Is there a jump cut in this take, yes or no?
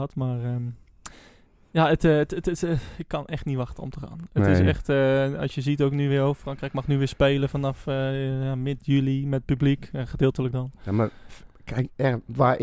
no